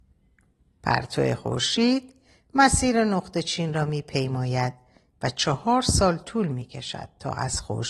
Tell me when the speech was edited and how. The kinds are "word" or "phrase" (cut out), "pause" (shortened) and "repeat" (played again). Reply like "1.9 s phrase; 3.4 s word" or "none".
none